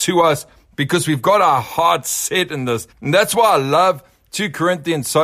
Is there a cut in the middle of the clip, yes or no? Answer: yes